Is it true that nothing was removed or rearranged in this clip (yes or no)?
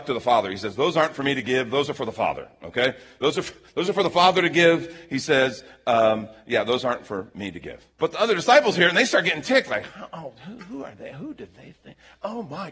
no